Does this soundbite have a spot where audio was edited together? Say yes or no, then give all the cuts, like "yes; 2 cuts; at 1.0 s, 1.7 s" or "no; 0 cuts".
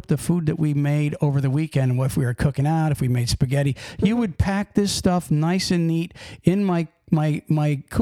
no; 0 cuts